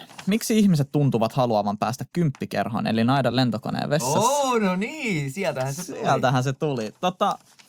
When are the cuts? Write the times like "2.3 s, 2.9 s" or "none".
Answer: none